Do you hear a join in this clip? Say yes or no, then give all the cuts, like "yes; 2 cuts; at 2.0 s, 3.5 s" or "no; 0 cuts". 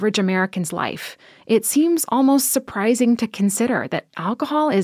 no; 0 cuts